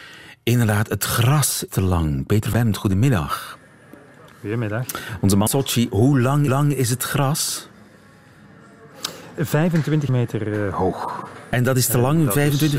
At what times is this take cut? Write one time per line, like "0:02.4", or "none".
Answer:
0:01.7
0:02.5
0:04.3
0:05.5
0:06.5
0:09.4
0:10.1

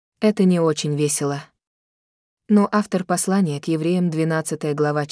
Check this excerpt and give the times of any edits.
none

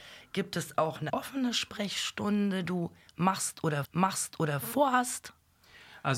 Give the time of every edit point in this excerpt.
0:01.1
0:02.6
0:03.8

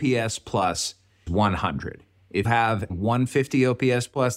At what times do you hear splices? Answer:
0:01.3
0:02.4
0:02.9

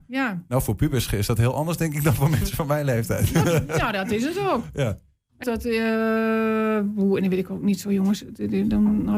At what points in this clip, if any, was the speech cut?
0:05.4

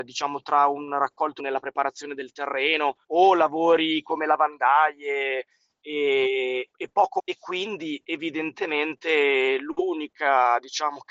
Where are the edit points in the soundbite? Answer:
0:01.4
0:03.0
0:06.7
0:07.2

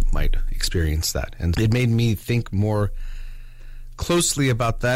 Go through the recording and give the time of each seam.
0:01.5

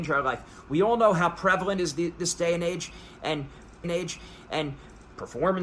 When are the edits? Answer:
0:01.8
0:03.8

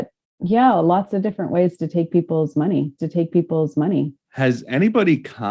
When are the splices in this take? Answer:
0:03.0

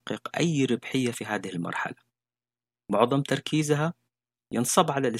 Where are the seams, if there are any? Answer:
none

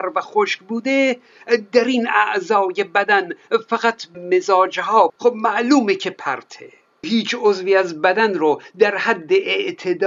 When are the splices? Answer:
0:04.1
0:05.1
0:07.0

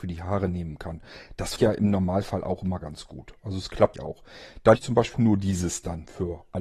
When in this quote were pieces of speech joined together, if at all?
0:01.6
0:03.9
0:04.7
0:05.1

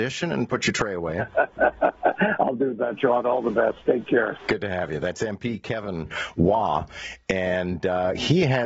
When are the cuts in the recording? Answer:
none

